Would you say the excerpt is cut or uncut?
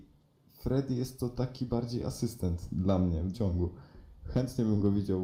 cut